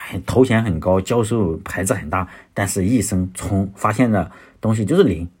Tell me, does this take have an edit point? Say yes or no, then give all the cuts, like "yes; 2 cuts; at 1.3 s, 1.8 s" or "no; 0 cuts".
no; 0 cuts